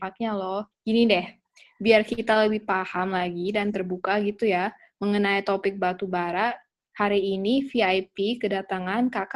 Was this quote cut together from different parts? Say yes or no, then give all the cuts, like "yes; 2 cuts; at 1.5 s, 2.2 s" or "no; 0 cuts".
no; 0 cuts